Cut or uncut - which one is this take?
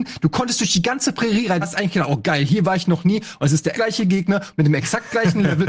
cut